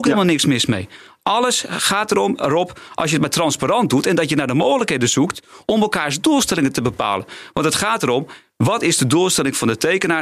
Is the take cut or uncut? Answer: uncut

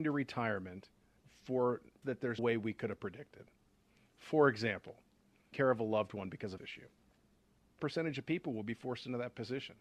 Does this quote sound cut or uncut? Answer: cut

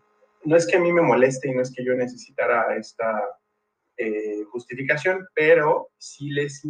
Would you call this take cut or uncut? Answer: uncut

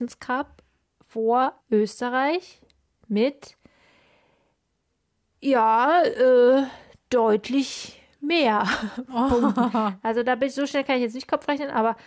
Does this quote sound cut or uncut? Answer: cut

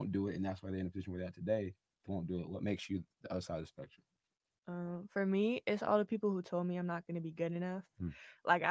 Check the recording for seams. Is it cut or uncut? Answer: cut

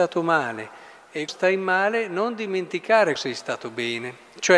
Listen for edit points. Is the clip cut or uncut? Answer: cut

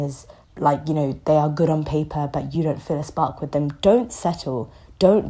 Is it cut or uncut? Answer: uncut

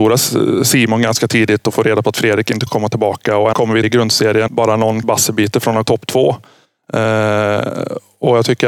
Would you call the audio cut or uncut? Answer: cut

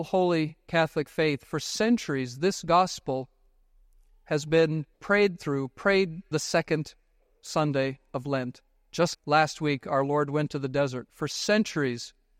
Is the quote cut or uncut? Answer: cut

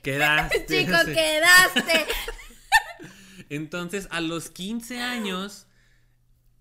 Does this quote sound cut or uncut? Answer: uncut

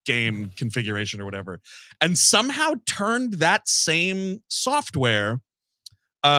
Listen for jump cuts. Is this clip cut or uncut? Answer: uncut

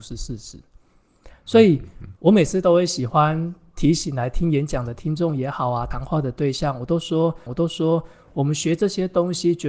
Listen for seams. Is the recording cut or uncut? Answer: cut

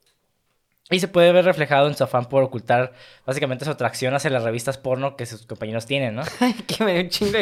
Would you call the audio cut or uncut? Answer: uncut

